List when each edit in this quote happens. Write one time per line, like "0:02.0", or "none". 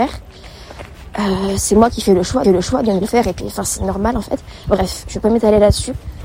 0:02.4
0:03.0
0:03.4